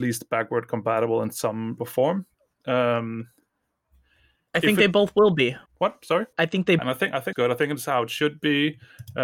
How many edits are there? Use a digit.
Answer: 5